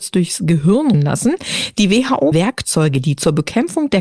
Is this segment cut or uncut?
cut